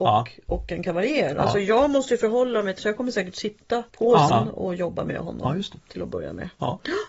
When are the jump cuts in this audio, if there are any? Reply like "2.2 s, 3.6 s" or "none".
2.8 s, 3.9 s, 4.3 s